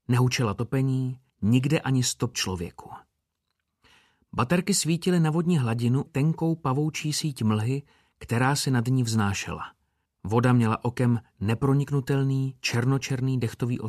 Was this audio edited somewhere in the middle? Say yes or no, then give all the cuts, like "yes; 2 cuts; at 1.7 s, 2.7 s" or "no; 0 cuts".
yes; 4 cuts; at 1.3 s, 2.3 s, 6.1 s, 10.1 s